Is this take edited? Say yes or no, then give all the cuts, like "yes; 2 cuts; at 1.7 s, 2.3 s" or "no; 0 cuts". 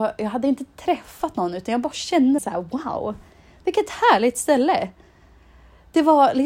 yes; 1 cut; at 2.4 s